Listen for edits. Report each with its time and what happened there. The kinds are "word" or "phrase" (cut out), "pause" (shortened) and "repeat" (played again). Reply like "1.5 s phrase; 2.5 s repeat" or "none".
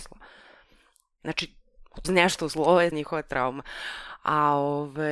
2.0 s word; 2.9 s word